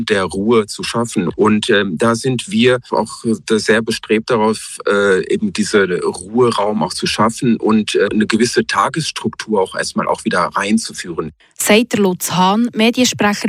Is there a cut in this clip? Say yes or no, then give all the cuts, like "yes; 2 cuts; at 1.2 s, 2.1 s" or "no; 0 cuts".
yes; 1 cut; at 2.9 s